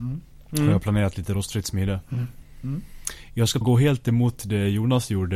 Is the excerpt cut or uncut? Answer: cut